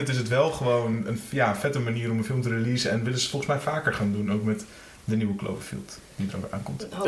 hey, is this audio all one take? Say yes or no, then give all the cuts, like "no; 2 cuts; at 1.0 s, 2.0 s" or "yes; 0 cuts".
yes; 0 cuts